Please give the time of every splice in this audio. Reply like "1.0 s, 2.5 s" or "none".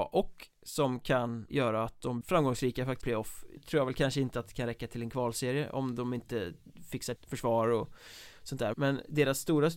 1.5 s, 2.2 s, 3.0 s, 3.6 s, 7.2 s, 8.7 s